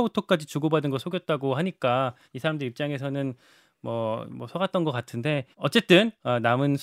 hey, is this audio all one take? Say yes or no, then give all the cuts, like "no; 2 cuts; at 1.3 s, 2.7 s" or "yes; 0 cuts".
no; 2 cuts; at 2.2 s, 5.5 s